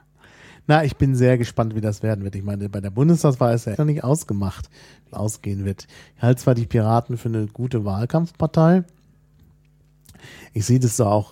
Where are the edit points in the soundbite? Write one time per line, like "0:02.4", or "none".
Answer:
0:03.7
0:05.1